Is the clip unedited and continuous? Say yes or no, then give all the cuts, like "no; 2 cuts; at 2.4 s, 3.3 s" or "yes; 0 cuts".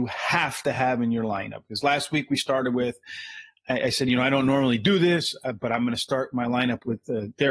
yes; 0 cuts